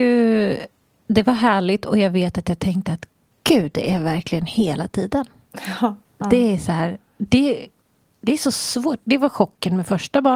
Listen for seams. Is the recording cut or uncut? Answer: uncut